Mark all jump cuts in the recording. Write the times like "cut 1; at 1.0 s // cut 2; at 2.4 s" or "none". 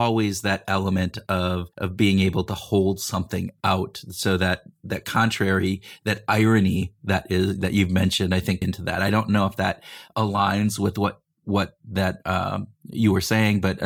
cut 1; at 1.7 s // cut 2; at 8.6 s